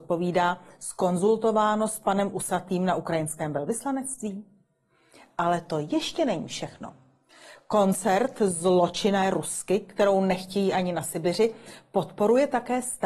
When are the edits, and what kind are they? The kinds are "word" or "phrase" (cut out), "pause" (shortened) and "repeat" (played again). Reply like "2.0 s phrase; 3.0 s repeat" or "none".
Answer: none